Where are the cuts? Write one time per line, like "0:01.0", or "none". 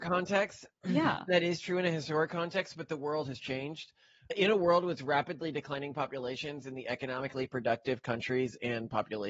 0:01.3